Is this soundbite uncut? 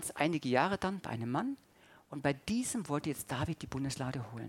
yes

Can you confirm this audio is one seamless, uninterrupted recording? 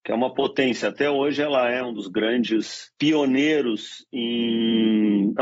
yes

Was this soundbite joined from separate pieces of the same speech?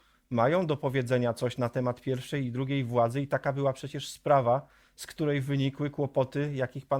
no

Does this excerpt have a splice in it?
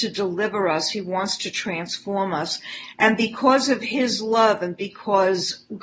no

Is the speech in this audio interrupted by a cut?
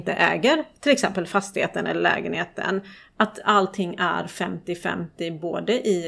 no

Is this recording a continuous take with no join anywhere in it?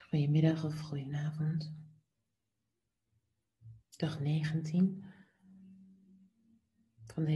no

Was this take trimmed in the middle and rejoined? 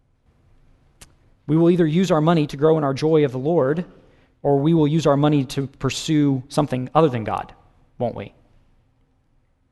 no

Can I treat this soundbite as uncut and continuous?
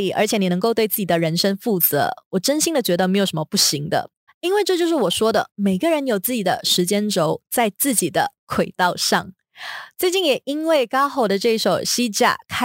no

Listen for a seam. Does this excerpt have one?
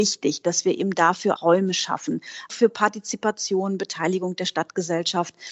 yes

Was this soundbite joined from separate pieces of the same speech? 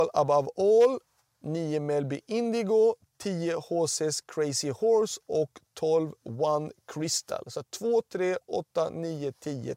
no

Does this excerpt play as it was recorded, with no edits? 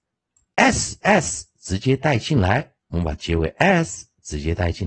no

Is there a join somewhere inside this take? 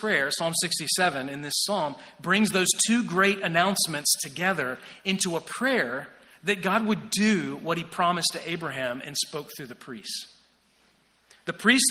no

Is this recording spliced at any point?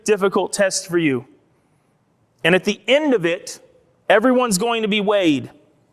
no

